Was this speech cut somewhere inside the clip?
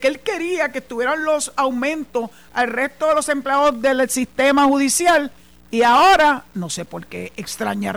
no; 0 cuts

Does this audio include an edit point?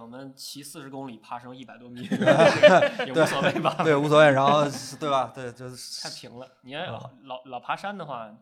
no; 0 cuts

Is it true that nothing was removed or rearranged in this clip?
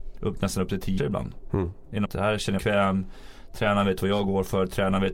no; 3 cuts; at 1.0 s, 2.0 s, 2.6 s

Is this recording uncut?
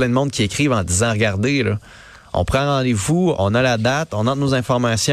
yes; 0 cuts

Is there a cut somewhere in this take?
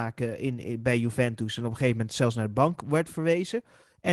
no; 0 cuts

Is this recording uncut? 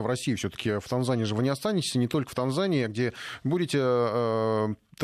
yes; 0 cuts

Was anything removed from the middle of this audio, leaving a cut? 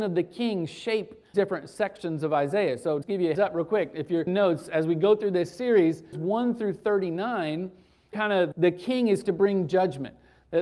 yes; 8 cuts; at 1.3 s, 3.0 s, 3.3 s, 4.3 s, 6.1 s, 8.1 s, 8.5 s, 9.2 s

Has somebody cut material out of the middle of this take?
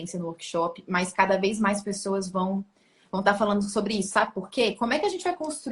no; 0 cuts

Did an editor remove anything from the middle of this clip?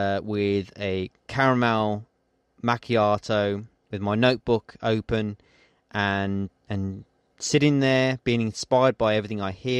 yes; 2 cuts; at 6.5 s, 7.3 s

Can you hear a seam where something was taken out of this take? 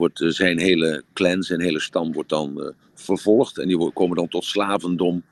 no; 0 cuts

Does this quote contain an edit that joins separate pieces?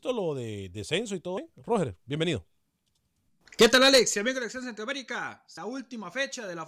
yes; 2 cuts; at 1.4 s, 5.6 s

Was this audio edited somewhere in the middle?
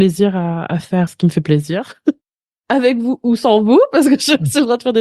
yes; 1 cut; at 1.1 s

